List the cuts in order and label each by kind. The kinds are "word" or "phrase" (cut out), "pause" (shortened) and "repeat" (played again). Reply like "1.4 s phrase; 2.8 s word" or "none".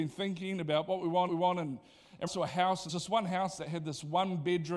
1.3 s repeat; 2.3 s word; 2.9 s word